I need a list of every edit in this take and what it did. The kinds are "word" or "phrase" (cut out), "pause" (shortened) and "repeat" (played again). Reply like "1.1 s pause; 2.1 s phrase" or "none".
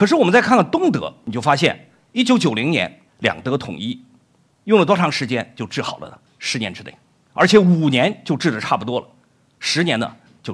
3.1 s pause; 6.3 s pause